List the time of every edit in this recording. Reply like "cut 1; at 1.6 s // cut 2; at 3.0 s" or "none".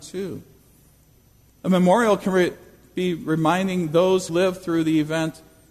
cut 1; at 4.3 s